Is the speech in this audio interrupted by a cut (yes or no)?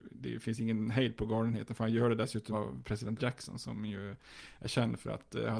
yes